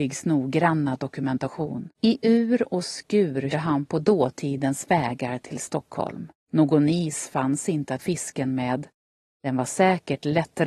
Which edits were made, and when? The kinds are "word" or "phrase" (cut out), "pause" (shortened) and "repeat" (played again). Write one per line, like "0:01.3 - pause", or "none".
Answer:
0:01.9 - pause
0:03.5 - word
0:06.4 - pause
0:08.0 - word